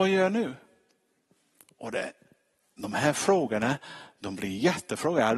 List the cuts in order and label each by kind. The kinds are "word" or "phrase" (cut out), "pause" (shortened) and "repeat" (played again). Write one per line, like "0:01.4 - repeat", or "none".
none